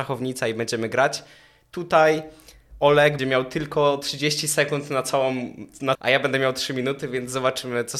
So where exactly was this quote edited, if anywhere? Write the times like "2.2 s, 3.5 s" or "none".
3.2 s, 5.9 s